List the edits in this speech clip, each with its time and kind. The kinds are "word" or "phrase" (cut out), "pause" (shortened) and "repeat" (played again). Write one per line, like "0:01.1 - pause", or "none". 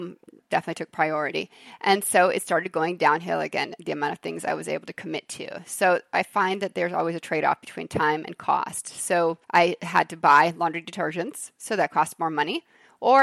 0:09.4 - pause